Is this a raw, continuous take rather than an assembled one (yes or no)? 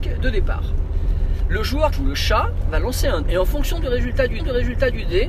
no